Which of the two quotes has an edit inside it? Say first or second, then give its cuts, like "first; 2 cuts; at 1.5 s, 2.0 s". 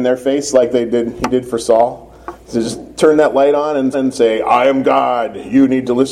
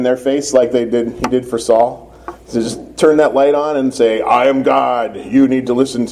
first; 1 cut; at 3.9 s